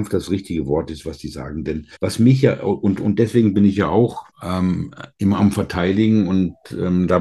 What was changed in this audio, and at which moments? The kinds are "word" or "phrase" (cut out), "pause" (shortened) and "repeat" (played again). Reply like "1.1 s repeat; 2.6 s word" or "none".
2.0 s pause; 4.3 s pause